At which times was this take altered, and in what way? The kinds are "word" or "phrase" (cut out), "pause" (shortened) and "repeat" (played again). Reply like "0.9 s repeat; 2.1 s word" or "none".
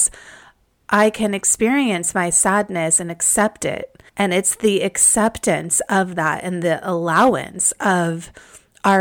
4.1 s pause